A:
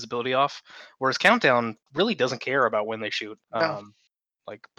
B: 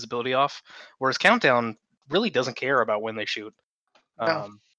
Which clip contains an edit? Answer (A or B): A